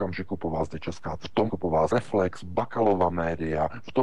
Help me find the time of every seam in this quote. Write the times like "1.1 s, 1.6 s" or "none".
1.2 s, 1.5 s, 1.9 s